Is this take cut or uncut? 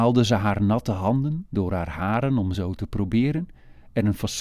uncut